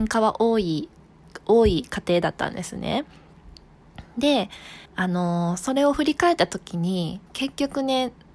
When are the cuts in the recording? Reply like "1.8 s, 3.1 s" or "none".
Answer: 4.8 s, 7.3 s